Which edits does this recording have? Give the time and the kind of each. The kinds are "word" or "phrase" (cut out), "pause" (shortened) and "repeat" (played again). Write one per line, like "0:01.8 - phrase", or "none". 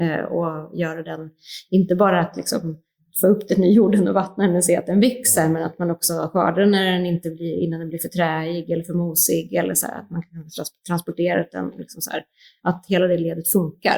none